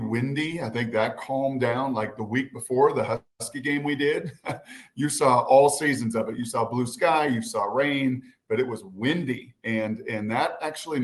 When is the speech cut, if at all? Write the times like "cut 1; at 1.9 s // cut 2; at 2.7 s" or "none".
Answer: none